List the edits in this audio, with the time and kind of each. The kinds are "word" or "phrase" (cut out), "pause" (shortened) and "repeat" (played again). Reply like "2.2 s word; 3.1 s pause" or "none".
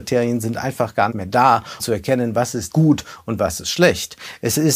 1.1 s word; 1.8 s word; 2.7 s word